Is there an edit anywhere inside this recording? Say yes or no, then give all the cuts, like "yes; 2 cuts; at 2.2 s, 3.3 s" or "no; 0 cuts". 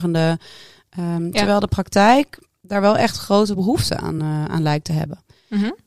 no; 0 cuts